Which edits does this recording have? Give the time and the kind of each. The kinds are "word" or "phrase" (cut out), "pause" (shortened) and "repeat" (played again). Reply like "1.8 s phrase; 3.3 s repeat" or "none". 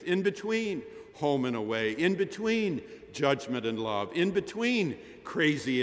none